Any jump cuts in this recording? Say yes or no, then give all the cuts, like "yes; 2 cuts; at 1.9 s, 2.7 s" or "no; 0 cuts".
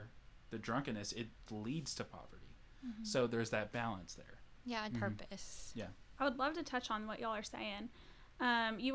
yes; 3 cuts; at 1.5 s, 4.9 s, 6.2 s